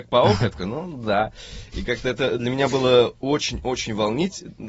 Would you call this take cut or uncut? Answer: uncut